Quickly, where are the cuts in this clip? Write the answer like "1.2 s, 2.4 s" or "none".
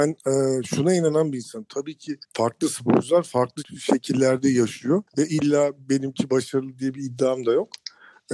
2.2 s, 5.1 s